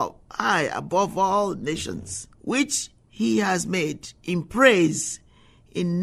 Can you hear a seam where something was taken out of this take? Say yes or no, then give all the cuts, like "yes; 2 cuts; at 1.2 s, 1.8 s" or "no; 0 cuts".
yes; 1 cut; at 2.3 s